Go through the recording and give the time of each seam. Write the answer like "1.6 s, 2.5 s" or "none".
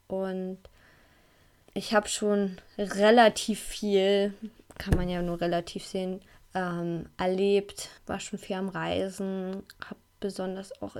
1.7 s, 6.3 s, 8.0 s